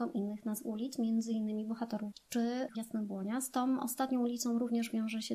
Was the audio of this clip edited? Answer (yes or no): yes